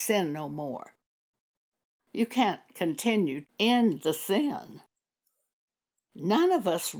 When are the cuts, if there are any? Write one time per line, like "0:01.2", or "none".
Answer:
0:03.4